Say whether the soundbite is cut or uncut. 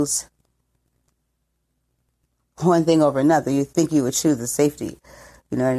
uncut